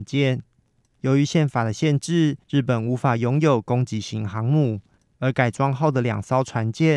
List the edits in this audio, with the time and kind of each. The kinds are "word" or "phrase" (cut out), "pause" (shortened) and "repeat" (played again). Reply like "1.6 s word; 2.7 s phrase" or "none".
2.4 s pause